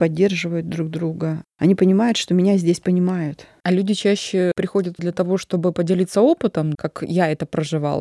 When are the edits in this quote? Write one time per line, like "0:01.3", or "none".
0:05.0
0:06.7